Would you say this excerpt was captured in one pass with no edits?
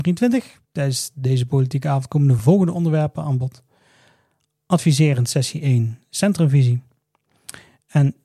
yes; 0 cuts

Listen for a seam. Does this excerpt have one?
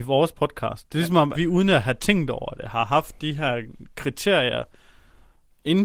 yes; 1 cut; at 1.3 s

